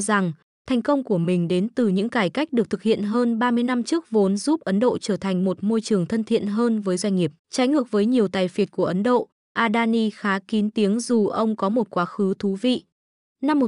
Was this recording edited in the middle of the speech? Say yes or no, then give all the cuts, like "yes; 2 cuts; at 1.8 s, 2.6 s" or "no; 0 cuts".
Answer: yes; 1 cut; at 7.4 s